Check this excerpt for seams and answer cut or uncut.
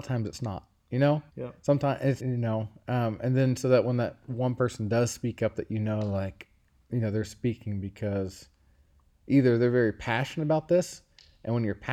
cut